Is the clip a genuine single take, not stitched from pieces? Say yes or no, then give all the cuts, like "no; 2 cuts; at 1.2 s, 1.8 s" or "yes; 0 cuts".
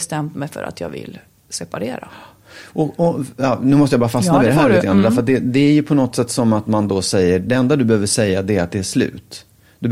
yes; 0 cuts